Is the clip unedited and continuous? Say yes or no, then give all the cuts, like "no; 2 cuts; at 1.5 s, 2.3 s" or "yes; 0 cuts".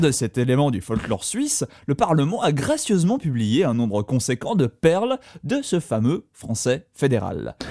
yes; 0 cuts